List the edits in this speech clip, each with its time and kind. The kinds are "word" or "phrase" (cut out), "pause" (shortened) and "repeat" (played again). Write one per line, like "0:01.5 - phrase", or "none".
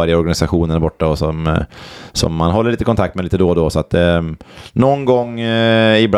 none